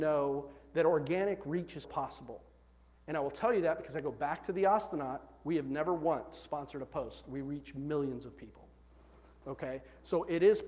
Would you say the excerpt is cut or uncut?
cut